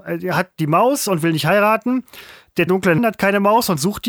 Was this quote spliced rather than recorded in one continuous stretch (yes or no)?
yes